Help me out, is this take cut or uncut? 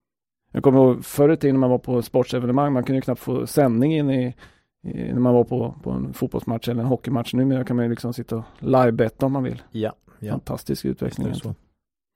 uncut